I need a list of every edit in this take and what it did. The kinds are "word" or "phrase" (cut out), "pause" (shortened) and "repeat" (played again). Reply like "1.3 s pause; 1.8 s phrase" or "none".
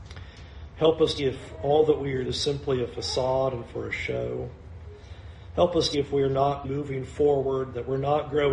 1.2 s word; 2.2 s word; 5.9 s word; 6.6 s word